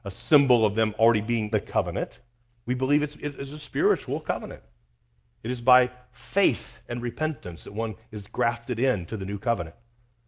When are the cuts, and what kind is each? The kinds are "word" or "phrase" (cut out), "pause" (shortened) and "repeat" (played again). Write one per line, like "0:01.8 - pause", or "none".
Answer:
0:01.5 - word